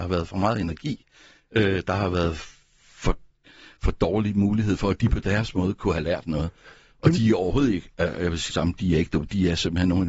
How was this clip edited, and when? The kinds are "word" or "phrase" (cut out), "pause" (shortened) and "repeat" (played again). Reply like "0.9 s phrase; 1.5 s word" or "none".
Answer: 8.5 s word